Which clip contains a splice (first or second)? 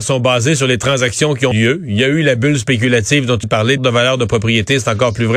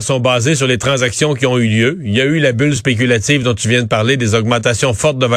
first